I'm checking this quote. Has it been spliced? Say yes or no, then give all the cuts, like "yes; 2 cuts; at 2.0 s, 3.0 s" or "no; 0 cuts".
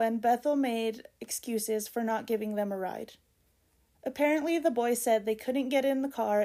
no; 0 cuts